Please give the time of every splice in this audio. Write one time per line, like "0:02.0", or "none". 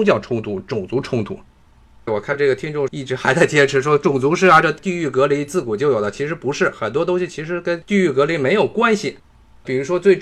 none